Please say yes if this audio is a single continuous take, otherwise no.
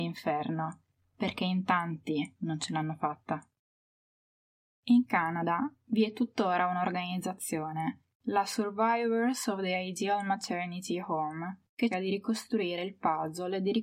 no